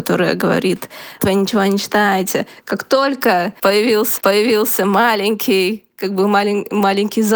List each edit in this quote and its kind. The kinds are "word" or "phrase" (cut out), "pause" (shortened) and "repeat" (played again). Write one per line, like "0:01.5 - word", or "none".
0:01.2 - word
0:04.2 - repeat